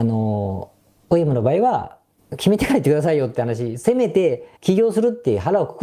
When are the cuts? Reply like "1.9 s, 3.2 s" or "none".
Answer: 2.2 s, 4.6 s